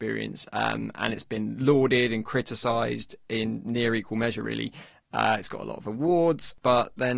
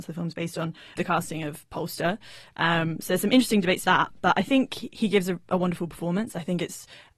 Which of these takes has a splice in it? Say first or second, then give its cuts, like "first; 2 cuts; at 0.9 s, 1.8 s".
second; 2 cuts; at 1.0 s, 3.8 s